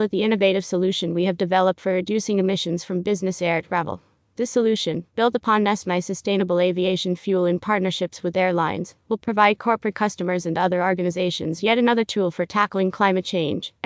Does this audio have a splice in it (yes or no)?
no